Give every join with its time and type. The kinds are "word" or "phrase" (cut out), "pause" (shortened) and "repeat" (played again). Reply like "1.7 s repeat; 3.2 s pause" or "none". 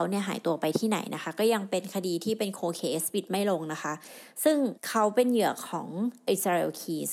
4.8 s pause